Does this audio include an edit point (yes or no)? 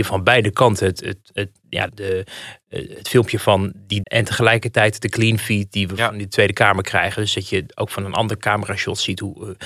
yes